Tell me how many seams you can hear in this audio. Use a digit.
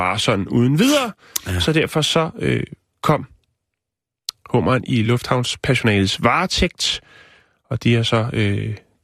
0